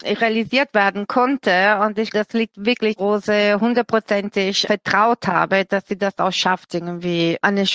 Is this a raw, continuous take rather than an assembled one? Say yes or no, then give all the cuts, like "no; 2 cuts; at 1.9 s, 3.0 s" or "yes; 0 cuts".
no; 3 cuts; at 2.1 s, 3.0 s, 4.6 s